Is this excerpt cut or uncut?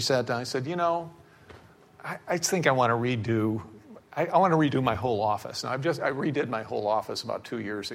uncut